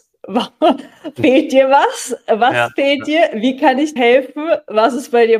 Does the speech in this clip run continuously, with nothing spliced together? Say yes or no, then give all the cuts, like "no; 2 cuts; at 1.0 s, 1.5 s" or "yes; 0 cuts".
no; 1 cut; at 4.0 s